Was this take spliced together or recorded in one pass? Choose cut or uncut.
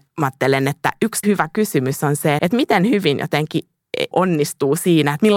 cut